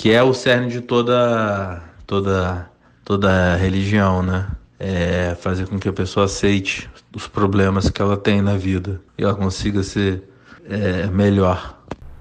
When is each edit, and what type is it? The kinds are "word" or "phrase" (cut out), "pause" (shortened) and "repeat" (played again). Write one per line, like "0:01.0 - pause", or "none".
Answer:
0:02.9 - pause
0:04.7 - pause
0:09.1 - pause
0:10.6 - pause